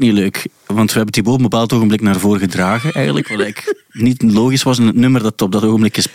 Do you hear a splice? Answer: no; 0 cuts

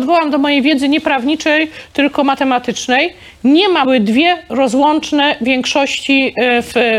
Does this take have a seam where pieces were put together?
yes; 1 cut; at 3.8 s

